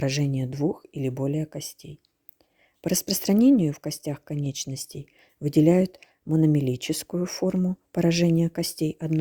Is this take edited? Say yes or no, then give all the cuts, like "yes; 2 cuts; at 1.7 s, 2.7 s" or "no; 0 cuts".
no; 0 cuts